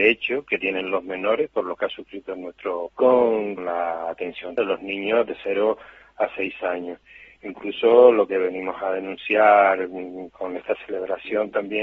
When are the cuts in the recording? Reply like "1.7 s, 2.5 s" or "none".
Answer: 1.8 s, 2.9 s, 3.6 s, 4.6 s